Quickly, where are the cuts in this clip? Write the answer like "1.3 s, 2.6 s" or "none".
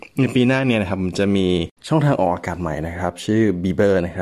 1.8 s